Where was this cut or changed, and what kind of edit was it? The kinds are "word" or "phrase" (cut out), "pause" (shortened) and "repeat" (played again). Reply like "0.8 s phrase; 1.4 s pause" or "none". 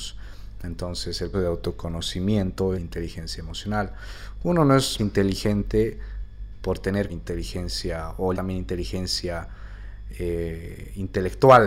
1.3 s word; 2.7 s phrase; 5.0 s word; 7.1 s phrase; 8.3 s word